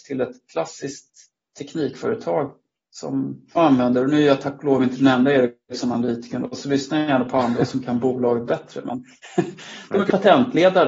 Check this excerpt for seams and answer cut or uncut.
cut